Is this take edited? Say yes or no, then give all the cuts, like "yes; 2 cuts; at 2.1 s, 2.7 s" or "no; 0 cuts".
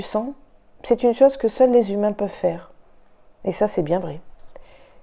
no; 0 cuts